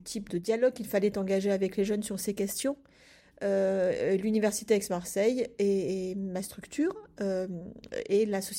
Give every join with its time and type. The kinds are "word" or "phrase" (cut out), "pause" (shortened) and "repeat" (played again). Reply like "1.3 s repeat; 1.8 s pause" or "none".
none